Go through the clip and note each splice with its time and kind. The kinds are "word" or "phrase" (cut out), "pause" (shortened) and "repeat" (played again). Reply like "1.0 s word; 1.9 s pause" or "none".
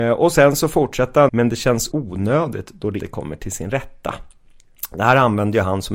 1.3 s word; 1.9 s word; 3.0 s word